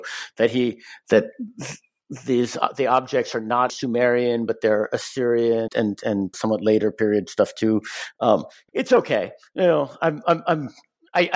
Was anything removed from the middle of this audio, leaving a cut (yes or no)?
yes